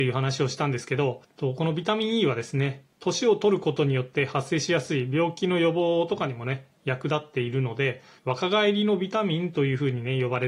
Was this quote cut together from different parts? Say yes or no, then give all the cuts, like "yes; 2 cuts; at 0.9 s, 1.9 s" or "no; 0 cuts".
yes; 1 cut; at 8.2 s